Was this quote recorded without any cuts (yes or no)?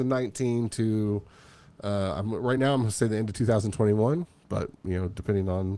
yes